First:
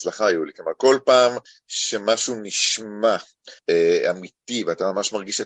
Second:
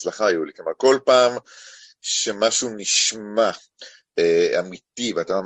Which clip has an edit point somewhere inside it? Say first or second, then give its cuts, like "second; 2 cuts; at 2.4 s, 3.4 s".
first; 2 cuts; at 1.5 s, 3.6 s